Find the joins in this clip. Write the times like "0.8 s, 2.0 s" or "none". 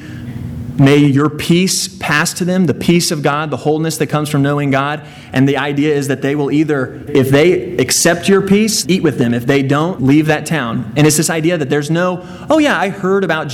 7.1 s, 8.8 s, 10.0 s